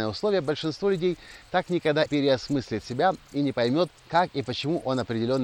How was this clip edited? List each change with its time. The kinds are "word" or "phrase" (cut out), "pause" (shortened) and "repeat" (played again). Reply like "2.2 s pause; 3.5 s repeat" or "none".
2.1 s phrase; 4.0 s pause